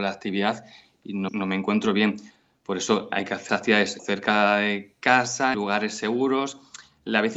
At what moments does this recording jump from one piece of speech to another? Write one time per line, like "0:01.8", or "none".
0:01.3
0:03.1
0:03.5
0:04.0
0:05.5